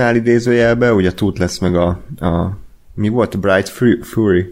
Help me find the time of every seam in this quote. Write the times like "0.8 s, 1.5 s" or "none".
none